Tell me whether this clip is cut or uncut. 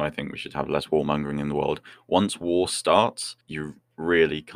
cut